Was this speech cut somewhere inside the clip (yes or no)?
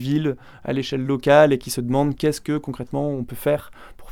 no